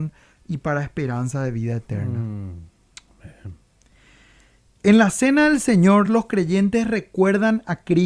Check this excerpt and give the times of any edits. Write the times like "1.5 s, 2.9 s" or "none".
none